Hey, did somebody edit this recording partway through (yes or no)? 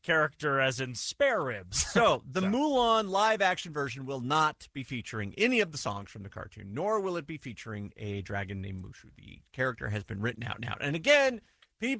yes